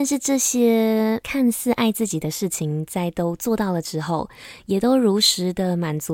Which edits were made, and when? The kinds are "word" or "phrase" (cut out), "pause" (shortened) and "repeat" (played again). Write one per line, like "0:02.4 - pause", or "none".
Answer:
0:01.2 - word